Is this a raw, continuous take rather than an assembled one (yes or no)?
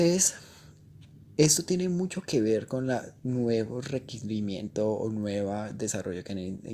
yes